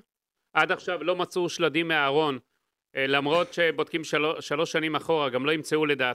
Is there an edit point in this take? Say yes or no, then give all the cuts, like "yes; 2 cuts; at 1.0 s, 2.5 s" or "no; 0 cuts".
no; 0 cuts